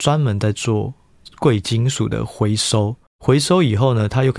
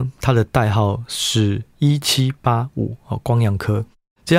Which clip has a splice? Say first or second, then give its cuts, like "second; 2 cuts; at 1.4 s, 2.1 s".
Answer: first; 1 cut; at 3.1 s